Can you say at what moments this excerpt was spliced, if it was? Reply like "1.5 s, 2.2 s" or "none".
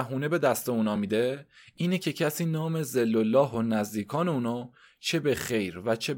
none